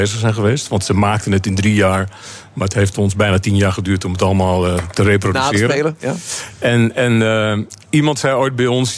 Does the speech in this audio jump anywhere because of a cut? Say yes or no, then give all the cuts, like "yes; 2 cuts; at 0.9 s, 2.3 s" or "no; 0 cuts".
no; 0 cuts